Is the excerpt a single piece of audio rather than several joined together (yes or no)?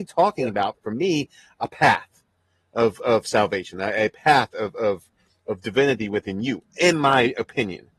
yes